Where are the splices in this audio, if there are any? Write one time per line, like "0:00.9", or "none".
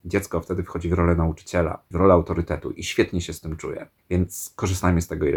0:01.9
0:04.0